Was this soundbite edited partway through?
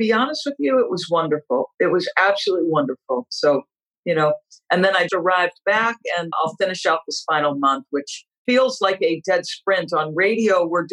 yes; 4 cuts; at 3.8 s, 5.1 s, 6.3 s, 8.5 s

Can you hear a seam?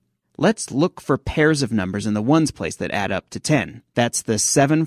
no; 0 cuts

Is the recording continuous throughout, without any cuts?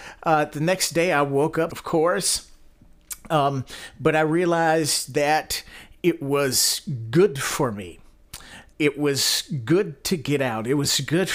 no; 2 cuts; at 1.7 s, 8.7 s

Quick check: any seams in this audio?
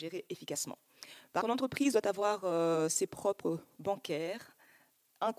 yes; 2 cuts; at 1.4 s, 3.8 s

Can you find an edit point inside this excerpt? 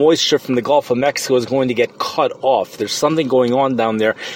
no; 0 cuts

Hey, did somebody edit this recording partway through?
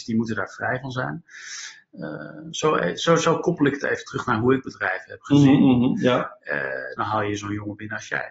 no; 0 cuts

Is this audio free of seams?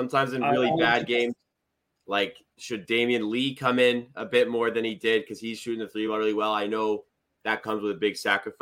yes; 0 cuts

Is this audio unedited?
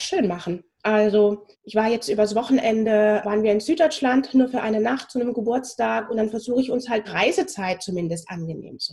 no; 3 cuts; at 1.5 s, 3.2 s, 7.0 s

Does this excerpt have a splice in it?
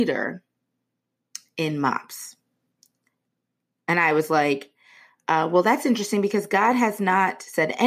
no; 0 cuts

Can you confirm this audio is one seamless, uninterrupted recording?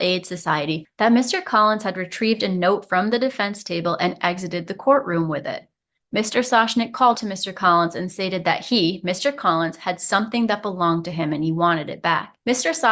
no; 1 cut; at 7.1 s

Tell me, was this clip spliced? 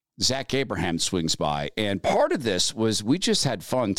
no; 0 cuts

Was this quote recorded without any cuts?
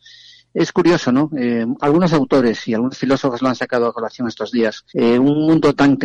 no; 1 cut; at 4.9 s

